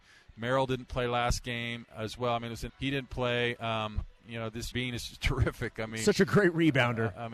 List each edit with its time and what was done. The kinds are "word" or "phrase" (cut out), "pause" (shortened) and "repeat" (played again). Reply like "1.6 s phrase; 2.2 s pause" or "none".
2.7 s phrase; 4.7 s word

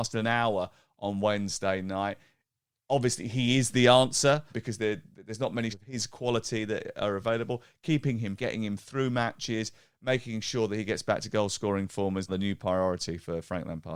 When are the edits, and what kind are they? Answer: 4.5 s word; 5.7 s word; 8.4 s word; 12.3 s word

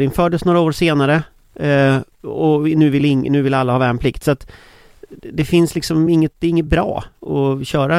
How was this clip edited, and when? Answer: none

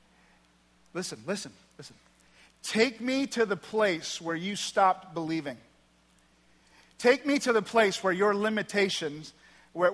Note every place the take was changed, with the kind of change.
none

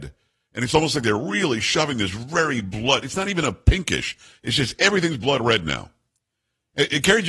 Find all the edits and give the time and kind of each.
none

